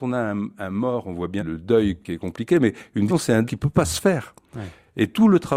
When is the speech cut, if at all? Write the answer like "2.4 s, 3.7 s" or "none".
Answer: 1.4 s, 2.0 s, 3.1 s, 3.4 s